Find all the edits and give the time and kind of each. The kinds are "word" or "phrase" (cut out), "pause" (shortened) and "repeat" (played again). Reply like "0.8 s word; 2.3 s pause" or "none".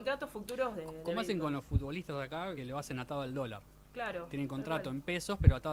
2.6 s phrase